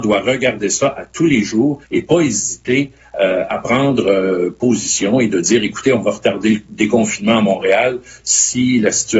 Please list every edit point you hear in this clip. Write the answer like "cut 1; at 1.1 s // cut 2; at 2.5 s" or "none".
cut 1; at 1.8 s